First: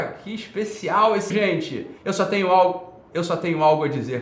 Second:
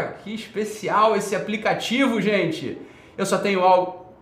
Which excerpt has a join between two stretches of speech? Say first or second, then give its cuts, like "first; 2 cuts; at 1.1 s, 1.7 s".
first; 2 cuts; at 1.3 s, 2.0 s